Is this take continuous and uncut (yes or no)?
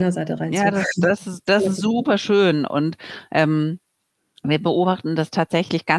yes